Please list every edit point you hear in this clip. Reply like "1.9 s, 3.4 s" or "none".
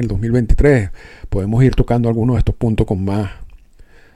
none